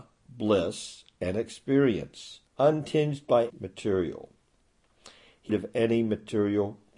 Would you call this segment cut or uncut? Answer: cut